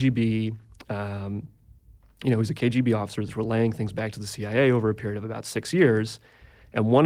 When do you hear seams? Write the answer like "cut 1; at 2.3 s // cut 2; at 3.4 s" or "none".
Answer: none

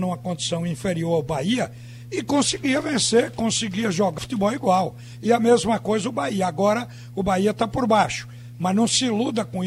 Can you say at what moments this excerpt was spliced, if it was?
cut 1; at 4.2 s

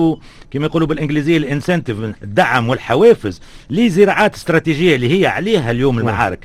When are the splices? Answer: cut 1; at 2.1 s

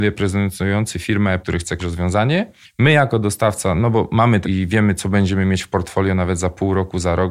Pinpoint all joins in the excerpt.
cut 1; at 1.4 s // cut 2; at 1.8 s // cut 3; at 4.4 s

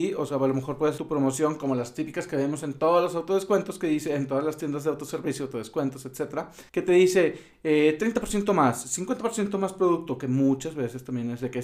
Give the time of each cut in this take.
cut 1; at 1.0 s // cut 2; at 6.7 s

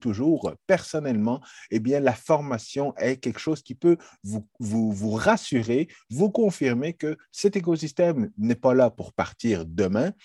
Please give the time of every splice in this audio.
none

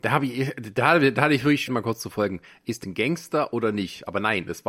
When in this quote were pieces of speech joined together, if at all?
cut 1; at 1.7 s // cut 2; at 2.8 s

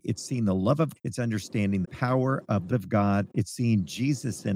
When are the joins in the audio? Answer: cut 1; at 1.0 s // cut 2; at 1.8 s // cut 3; at 2.7 s // cut 4; at 3.3 s

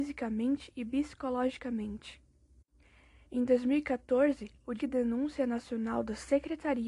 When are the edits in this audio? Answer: cut 1; at 4.8 s

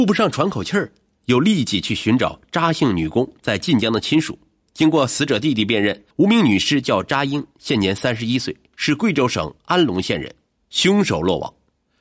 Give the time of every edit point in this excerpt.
cut 1; at 6.1 s // cut 2; at 10.5 s

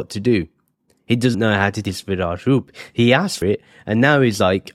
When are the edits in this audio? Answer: cut 1; at 1.3 s // cut 2; at 1.8 s // cut 3; at 3.4 s

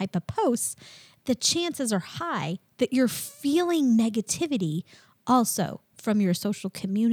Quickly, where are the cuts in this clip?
none

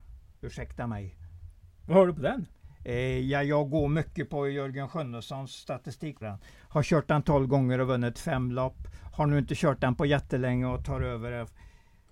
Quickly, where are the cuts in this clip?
cut 1; at 6.2 s

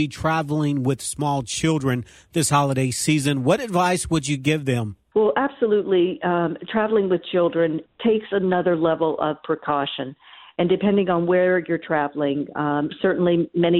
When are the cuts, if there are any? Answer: none

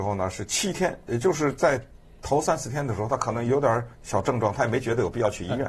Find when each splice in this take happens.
cut 1; at 3.9 s

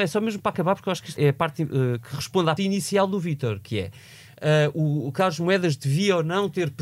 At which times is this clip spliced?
cut 1; at 1.2 s // cut 2; at 2.6 s

